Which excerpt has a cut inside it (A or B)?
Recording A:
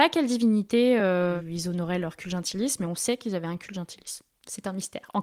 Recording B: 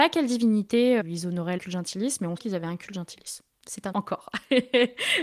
B